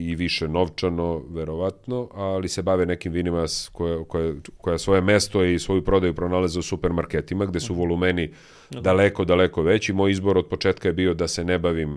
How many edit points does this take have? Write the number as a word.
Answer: zero